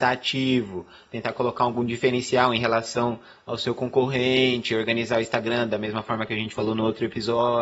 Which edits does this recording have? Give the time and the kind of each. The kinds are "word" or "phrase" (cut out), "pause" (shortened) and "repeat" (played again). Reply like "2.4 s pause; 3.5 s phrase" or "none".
none

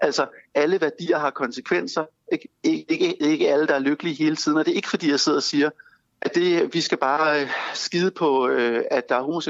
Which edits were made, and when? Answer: 6.0 s pause

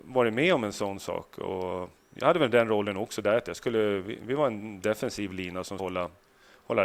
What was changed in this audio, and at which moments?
5.8 s word

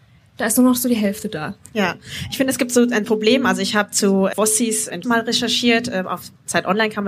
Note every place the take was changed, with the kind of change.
3.0 s word; 5.0 s word

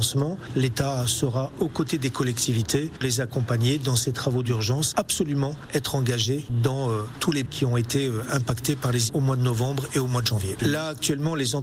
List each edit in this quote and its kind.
3.0 s word; 4.9 s phrase; 7.5 s word; 9.1 s word

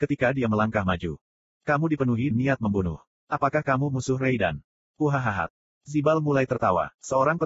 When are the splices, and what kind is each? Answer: 2.3 s word

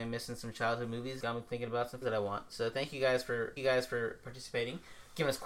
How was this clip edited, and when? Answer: 1.2 s word; 2.0 s word; 3.6 s repeat

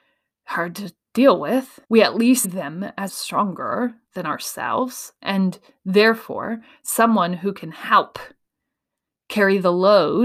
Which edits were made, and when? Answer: 1.8 s pause; 2.4 s word; 3.1 s word

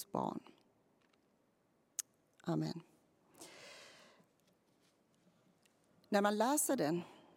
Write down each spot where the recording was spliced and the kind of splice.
none

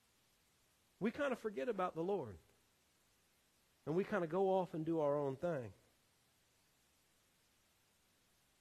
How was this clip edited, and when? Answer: none

